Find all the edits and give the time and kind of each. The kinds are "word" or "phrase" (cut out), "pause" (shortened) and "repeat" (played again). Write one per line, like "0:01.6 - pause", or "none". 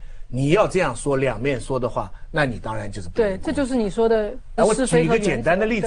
0:04.6 - phrase